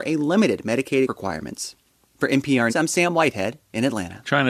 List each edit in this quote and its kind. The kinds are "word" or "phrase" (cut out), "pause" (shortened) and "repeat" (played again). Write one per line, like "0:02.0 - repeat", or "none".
0:01.1 - phrase
0:02.7 - word